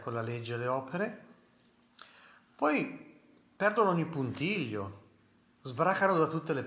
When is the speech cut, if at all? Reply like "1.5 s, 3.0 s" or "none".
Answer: none